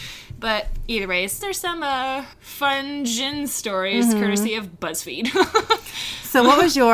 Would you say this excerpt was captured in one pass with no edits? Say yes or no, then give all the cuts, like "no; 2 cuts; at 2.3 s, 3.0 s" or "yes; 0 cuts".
no; 2 cuts; at 1.4 s, 2.3 s